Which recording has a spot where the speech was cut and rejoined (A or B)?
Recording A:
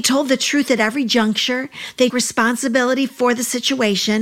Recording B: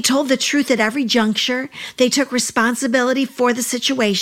A